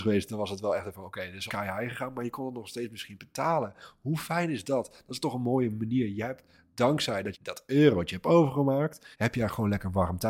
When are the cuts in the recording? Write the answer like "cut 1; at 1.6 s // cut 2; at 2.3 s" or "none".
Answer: cut 1; at 1.5 s // cut 2; at 7.3 s // cut 3; at 9.1 s